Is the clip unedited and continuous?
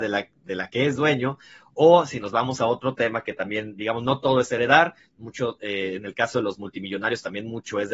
yes; 0 cuts

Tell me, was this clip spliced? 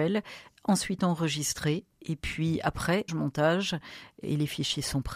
yes; 2 cuts; at 1.9 s, 3.1 s

